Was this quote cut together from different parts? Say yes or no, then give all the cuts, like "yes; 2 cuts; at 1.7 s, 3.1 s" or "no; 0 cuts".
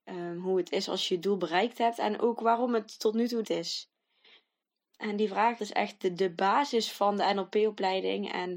yes; 3 cuts; at 3.4 s, 4.6 s, 5.6 s